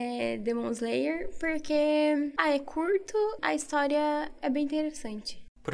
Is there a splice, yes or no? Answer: no